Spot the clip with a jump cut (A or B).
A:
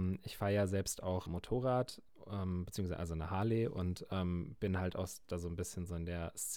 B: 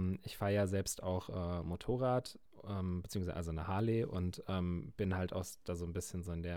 A